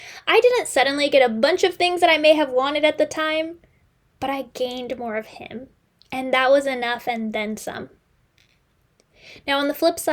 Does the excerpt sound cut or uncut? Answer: uncut